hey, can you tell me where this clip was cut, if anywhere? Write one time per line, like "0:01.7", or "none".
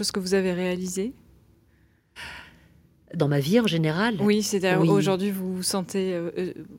0:03.2